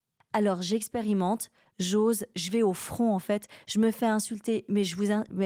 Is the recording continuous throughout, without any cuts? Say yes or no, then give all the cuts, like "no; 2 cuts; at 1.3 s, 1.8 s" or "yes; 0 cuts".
yes; 0 cuts